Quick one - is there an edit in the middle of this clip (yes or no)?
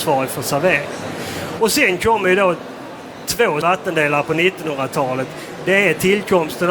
yes